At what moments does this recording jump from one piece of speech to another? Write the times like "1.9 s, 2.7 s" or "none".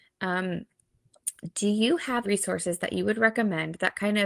2.2 s